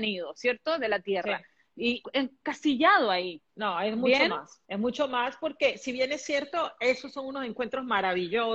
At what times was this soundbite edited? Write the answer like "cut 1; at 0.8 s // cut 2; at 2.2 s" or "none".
cut 1; at 2.0 s // cut 2; at 3.5 s // cut 3; at 4.6 s